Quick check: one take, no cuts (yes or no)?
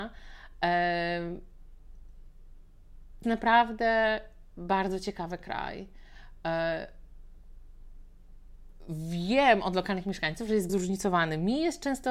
no